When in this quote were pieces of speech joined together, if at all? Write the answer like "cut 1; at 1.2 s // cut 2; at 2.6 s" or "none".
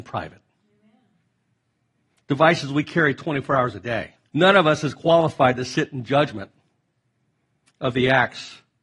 cut 1; at 4.3 s